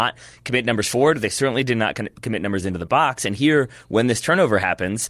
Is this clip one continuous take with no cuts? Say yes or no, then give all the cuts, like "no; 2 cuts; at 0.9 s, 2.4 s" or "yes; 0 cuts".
yes; 0 cuts